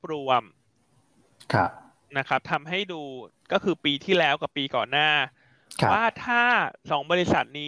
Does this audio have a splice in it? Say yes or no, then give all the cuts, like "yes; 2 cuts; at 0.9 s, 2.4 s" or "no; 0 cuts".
no; 0 cuts